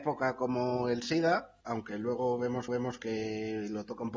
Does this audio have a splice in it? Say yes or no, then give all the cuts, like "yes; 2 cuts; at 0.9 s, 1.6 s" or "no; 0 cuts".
yes; 2 cuts; at 1.6 s, 2.7 s